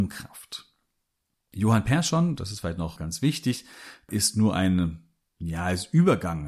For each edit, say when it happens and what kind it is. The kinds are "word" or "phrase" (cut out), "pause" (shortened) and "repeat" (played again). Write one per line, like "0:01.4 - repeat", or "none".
none